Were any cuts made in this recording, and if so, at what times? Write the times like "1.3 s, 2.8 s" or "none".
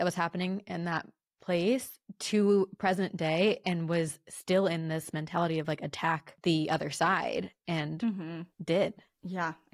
none